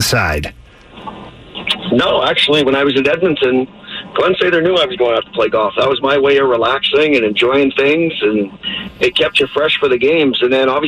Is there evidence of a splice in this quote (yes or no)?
no